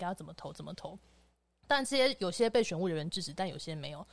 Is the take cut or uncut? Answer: uncut